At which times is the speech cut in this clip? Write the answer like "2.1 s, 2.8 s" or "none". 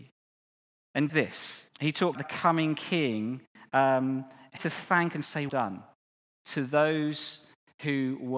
1.1 s, 1.7 s, 2.1 s, 4.6 s, 5.5 s